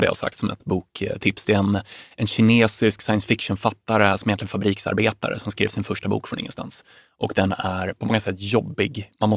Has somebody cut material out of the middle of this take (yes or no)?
no